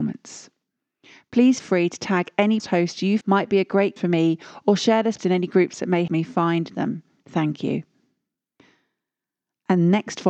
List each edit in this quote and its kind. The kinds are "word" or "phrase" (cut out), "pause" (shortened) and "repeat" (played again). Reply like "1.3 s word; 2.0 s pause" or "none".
1.6 s word; 2.6 s word; 3.2 s word; 4.0 s word; 5.2 s word; 6.1 s word